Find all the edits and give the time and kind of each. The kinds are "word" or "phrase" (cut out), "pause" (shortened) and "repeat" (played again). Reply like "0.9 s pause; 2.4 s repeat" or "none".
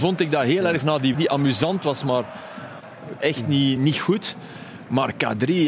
1.1 s word; 3.2 s word; 3.8 s word